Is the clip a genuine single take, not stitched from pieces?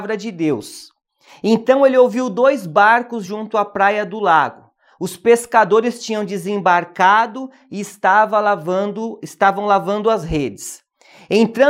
yes; 0 cuts

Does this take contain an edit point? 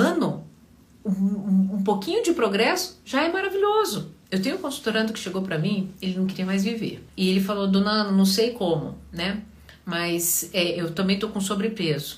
yes; 2 cuts; at 4.2 s, 7.1 s

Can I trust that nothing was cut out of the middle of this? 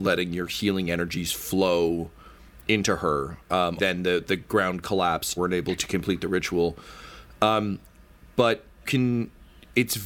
no; 4 cuts; at 3.8 s, 5.4 s, 5.8 s, 8.8 s

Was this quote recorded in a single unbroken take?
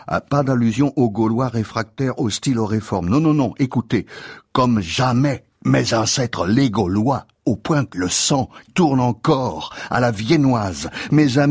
no; 2 cuts; at 7.9 s, 8.7 s

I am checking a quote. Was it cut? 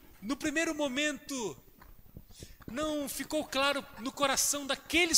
no; 0 cuts

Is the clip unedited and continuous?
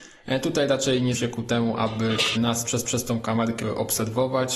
no; 4 cuts; at 1.1 s, 2.4 s, 2.8 s, 3.6 s

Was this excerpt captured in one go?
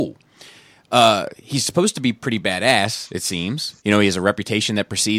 yes; 0 cuts

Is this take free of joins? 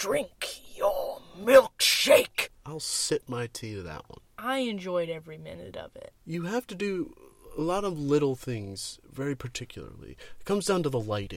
no; 1 cut; at 6.2 s

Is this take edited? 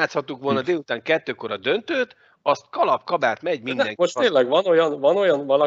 no; 0 cuts

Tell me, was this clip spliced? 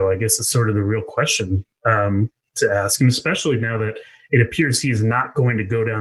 no; 0 cuts

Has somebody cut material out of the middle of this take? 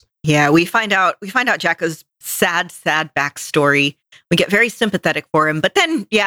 no; 0 cuts

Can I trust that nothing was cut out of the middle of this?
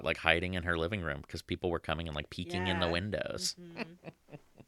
yes; 0 cuts

